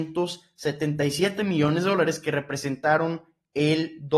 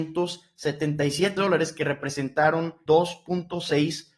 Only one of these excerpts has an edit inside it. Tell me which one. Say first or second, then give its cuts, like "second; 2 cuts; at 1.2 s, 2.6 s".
second; 2 cuts; at 1.4 s, 2.9 s